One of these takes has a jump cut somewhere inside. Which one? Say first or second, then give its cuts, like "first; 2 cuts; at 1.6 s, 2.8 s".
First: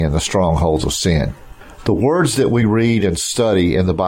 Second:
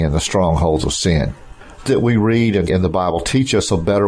second; 2 cuts; at 1.9 s, 2.7 s